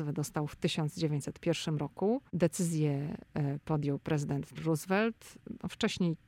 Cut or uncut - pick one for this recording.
cut